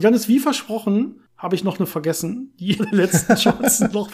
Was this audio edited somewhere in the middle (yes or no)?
yes